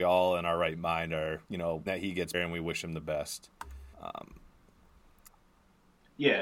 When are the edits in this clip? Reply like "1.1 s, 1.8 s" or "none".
1.4 s, 1.9 s, 2.3 s, 3.9 s